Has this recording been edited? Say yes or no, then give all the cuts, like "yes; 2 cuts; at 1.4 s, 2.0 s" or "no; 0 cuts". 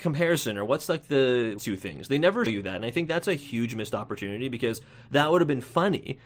yes; 2 cuts; at 1.6 s, 2.5 s